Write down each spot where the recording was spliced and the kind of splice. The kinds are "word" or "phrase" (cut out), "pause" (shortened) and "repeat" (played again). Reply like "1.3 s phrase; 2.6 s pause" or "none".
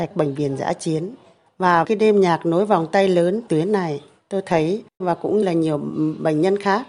1.8 s word; 3.5 s word; 5.0 s word; 5.4 s word